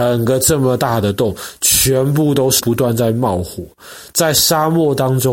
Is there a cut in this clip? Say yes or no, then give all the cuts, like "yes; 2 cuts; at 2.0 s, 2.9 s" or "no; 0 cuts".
no; 0 cuts